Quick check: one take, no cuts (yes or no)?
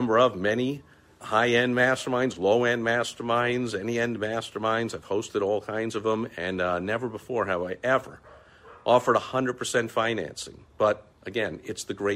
no